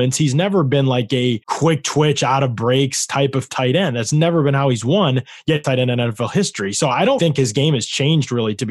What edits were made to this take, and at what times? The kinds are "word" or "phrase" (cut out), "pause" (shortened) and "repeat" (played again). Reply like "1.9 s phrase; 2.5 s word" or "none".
1.4 s pause; 5.6 s phrase; 7.2 s word

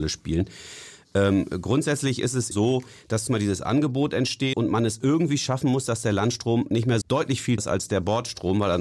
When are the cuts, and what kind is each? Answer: 2.5 s word; 3.3 s word; 4.5 s word; 7.0 s word; 7.6 s word

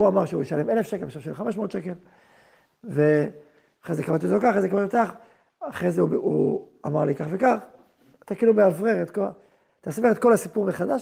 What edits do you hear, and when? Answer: none

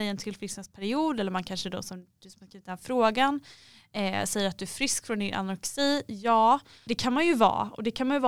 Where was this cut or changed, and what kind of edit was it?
6.9 s word

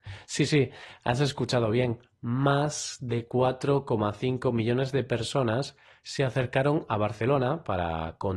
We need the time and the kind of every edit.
none

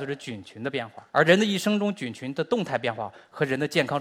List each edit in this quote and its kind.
1.1 s pause

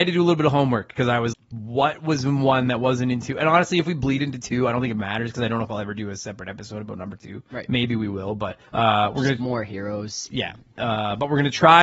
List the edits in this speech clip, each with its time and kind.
1.3 s word; 8.6 s pause

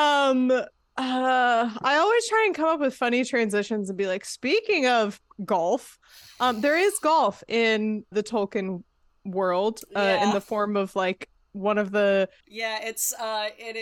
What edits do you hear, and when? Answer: 8.1 s word; 12.4 s word

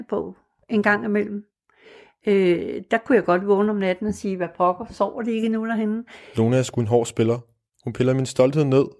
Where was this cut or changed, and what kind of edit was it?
none

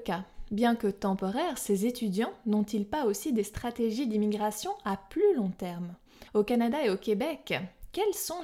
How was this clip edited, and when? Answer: 6.3 s pause

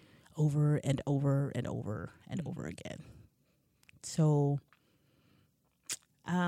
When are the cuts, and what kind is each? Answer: none

